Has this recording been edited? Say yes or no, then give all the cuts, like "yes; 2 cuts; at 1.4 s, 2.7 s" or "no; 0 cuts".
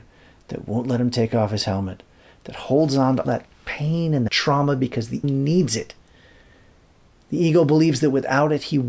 yes; 3 cuts; at 3.2 s, 4.3 s, 5.2 s